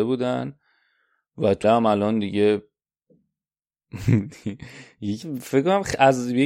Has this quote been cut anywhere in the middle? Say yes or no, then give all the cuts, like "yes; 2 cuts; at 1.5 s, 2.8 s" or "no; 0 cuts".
yes; 2 cuts; at 1.6 s, 5.2 s